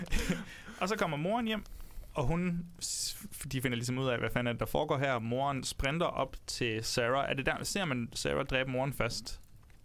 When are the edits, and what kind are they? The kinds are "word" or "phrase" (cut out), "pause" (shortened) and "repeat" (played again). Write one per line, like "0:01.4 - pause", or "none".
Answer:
none

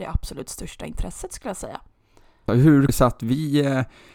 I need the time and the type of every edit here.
0:02.9 - word

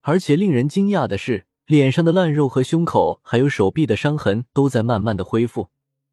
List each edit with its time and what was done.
0:01.6 - pause

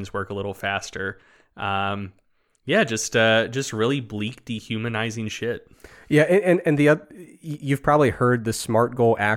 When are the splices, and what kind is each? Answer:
none

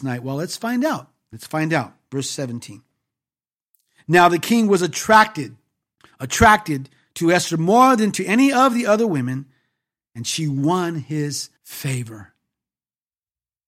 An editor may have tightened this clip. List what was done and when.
0:06.0 - pause
0:11.6 - pause

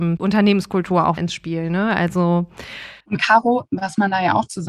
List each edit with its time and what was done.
0:01.2 - word
0:03.0 - pause
0:03.7 - word

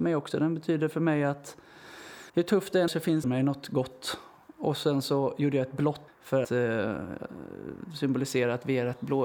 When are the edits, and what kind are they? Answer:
0:02.3 - pause
0:02.9 - word
0:03.2 - phrase
0:06.1 - word
0:06.4 - word

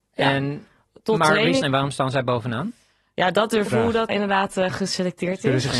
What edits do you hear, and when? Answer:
0:01.6 - phrase
0:03.7 - phrase
0:04.1 - word

